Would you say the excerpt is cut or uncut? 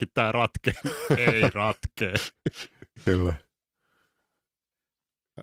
uncut